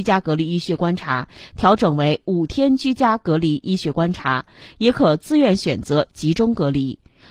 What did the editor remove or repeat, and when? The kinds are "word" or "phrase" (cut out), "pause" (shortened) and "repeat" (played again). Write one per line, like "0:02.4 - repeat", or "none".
none